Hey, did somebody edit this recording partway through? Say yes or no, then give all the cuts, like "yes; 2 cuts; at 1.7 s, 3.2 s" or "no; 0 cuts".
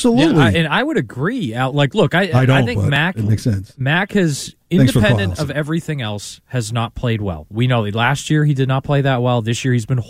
no; 0 cuts